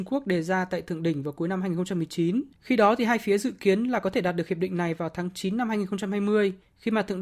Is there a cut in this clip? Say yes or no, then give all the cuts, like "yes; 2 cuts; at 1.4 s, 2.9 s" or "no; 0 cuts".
yes; 1 cut; at 2.6 s